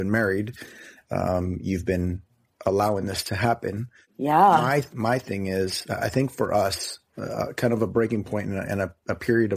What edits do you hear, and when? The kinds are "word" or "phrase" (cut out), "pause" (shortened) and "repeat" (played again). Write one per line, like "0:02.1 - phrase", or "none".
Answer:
none